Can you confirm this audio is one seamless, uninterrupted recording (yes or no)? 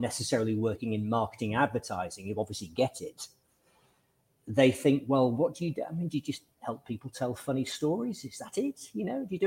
yes